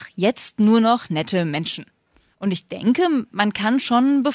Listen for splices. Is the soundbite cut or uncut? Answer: uncut